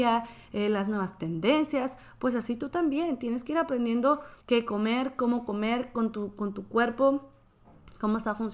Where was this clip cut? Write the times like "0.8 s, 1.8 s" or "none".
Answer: 4.4 s